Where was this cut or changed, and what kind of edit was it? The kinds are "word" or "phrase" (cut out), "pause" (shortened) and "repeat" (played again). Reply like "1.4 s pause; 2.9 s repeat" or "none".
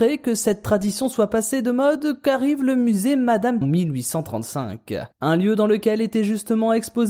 3.6 s phrase